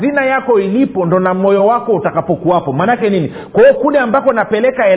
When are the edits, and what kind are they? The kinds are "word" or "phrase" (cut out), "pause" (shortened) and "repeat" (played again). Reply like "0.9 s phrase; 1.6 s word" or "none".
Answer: none